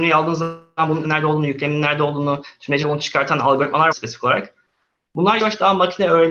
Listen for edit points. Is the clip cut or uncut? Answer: cut